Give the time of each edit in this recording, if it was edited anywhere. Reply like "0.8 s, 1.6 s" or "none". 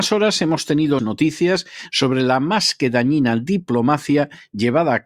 1.0 s